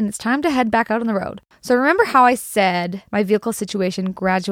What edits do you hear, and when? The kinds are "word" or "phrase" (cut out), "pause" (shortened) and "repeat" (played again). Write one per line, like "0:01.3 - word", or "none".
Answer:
0:03.1 - pause